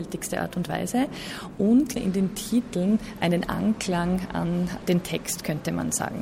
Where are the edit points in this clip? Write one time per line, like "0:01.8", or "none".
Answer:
0:02.0